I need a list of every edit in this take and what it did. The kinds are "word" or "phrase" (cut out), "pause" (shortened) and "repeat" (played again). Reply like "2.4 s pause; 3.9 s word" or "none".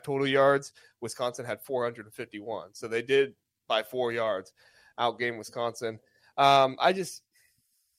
none